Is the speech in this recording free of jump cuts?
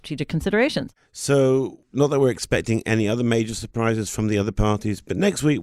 no; 1 cut; at 1.8 s

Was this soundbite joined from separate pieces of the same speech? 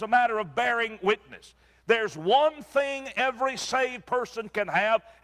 no; 0 cuts

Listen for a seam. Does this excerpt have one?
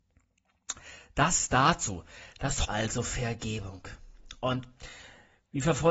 yes; 1 cut; at 2.7 s

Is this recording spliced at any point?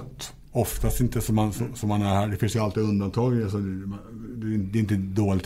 no; 0 cuts

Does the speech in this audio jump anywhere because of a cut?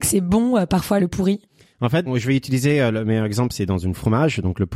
yes; 2 cuts; at 1.0 s, 2.1 s

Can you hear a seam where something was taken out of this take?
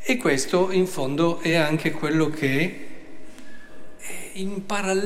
no; 0 cuts

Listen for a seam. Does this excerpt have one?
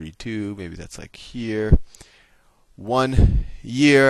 no; 0 cuts

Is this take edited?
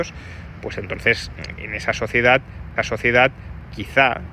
yes; 2 cuts; at 1.6 s, 2.8 s

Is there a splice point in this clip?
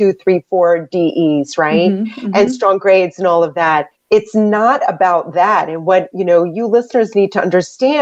yes; 1 cut; at 3.9 s

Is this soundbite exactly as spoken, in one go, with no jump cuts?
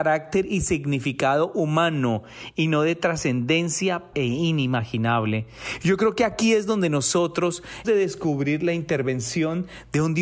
no; 2 cuts; at 4.1 s, 7.8 s

